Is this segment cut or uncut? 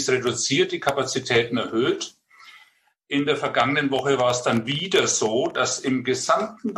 uncut